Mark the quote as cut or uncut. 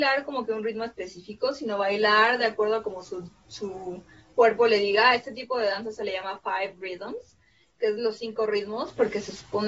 uncut